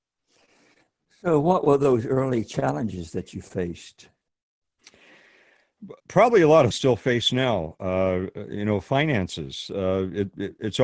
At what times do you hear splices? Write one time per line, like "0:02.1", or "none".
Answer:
0:06.0
0:06.7